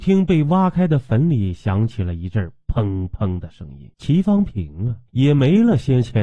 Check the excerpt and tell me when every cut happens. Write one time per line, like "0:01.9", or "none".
0:03.9
0:05.1